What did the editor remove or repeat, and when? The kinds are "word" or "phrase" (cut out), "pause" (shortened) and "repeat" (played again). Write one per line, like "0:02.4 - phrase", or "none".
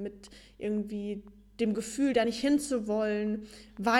none